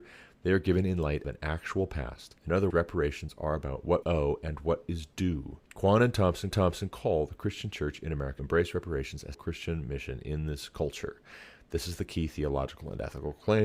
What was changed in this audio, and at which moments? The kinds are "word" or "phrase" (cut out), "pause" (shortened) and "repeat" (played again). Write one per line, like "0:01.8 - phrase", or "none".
0:01.2 - word
0:02.4 - pause
0:02.7 - word
0:04.0 - word
0:05.6 - pause
0:06.5 - repeat
0:08.4 - word
0:09.3 - phrase